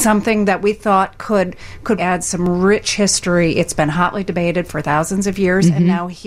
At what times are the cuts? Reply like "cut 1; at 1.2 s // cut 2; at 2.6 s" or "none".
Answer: cut 1; at 2.0 s